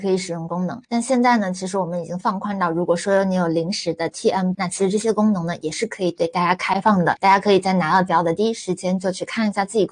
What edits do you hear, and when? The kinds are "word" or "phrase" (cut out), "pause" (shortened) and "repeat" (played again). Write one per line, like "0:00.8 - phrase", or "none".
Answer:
0:04.5 - word
0:08.1 - word